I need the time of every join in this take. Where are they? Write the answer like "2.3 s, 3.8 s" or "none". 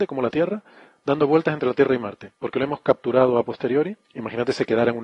2.4 s, 4.0 s